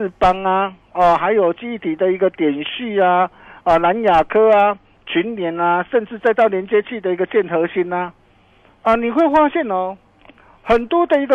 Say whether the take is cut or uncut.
uncut